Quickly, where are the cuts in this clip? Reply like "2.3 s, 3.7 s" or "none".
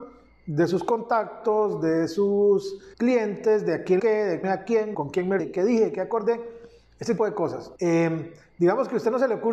2.9 s, 4.0 s, 4.4 s, 4.9 s, 5.4 s, 7.2 s, 7.8 s